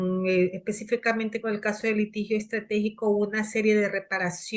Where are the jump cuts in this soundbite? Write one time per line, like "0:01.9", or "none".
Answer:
none

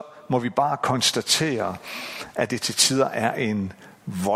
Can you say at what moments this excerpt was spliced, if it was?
none

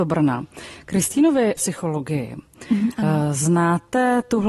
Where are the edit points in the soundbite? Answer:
0:01.6

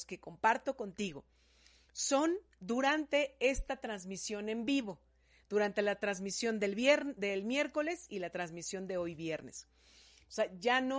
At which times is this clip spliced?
none

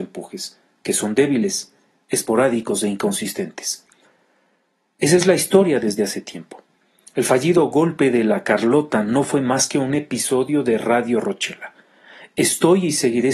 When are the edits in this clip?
none

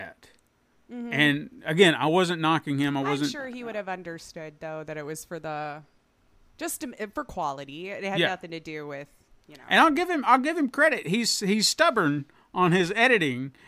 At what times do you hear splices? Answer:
none

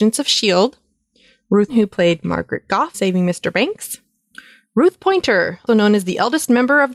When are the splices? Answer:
0:01.7
0:02.9
0:05.7

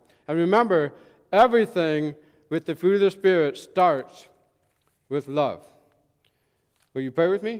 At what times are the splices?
none

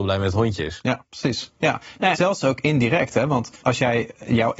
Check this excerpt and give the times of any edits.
0:02.2
0:03.6

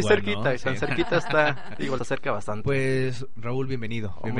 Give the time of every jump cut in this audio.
0:02.0

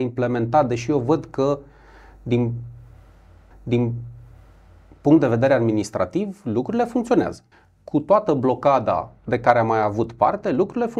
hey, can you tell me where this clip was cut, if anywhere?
0:03.5
0:07.5
0:09.2

